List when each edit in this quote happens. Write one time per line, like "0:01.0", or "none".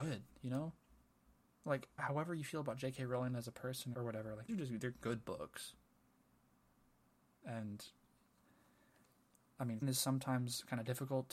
0:02.0
0:03.9
0:04.5
0:09.8